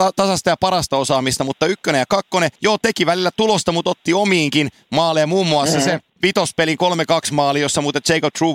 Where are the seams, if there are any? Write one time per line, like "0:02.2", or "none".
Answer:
0:02.6
0:06.1